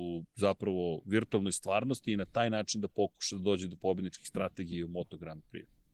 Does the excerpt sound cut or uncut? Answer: uncut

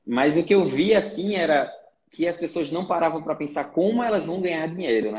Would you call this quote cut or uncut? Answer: uncut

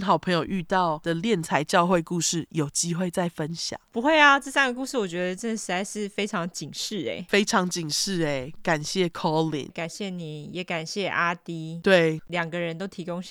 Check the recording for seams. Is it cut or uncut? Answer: cut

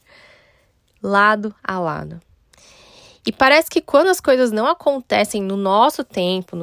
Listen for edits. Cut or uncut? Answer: uncut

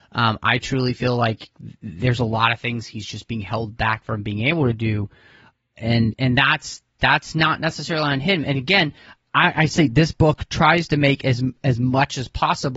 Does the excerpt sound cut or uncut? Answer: uncut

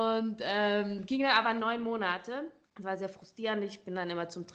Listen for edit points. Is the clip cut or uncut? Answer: cut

